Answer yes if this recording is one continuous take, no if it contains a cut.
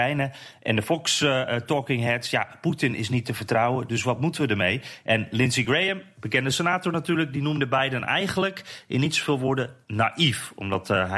yes